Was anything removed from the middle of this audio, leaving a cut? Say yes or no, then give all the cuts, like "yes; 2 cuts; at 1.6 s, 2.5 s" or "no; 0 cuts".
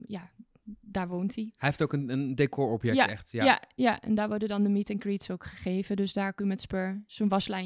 yes; 1 cut; at 6.4 s